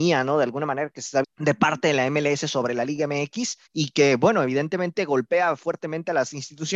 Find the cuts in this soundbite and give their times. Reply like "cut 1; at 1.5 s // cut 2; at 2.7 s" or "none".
cut 1; at 1.2 s // cut 2; at 3.7 s